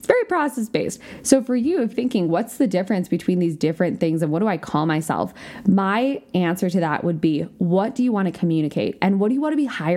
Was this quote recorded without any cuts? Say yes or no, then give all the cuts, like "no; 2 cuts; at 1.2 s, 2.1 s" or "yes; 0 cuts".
no; 1 cut; at 1.9 s